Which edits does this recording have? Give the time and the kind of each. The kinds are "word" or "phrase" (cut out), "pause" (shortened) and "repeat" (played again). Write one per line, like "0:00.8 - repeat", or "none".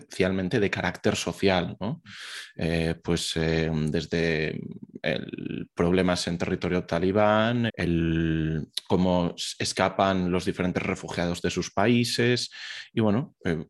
0:07.7 - word